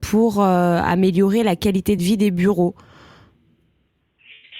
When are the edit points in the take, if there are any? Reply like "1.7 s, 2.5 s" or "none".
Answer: none